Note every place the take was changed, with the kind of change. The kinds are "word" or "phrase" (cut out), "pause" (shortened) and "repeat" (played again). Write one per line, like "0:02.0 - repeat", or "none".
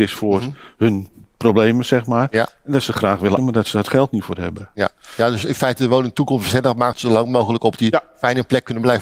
0:03.4 - word
0:06.9 - word